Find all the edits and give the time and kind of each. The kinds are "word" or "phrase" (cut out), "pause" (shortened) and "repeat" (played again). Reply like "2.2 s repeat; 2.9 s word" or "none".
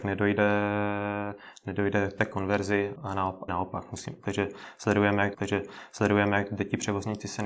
3.0 s word; 3.5 s phrase; 5.3 s repeat